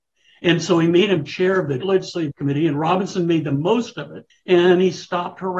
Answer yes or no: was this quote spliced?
yes